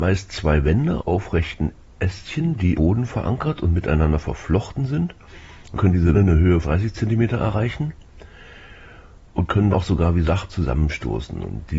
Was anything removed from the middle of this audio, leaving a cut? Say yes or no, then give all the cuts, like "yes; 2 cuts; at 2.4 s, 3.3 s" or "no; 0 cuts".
yes; 8 cuts; at 1.0 s, 1.8 s, 2.7 s, 5.7 s, 6.1 s, 6.6 s, 9.7 s, 10.2 s